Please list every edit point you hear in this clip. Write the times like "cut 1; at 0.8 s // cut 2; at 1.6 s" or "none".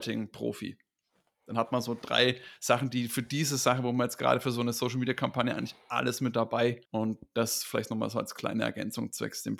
cut 1; at 6.9 s